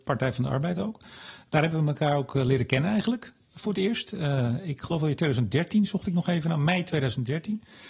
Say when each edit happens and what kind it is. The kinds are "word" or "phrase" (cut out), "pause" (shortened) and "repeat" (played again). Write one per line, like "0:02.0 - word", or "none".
none